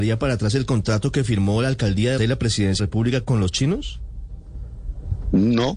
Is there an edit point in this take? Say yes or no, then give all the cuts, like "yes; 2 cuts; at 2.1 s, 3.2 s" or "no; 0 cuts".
yes; 2 cuts; at 2.2 s, 2.8 s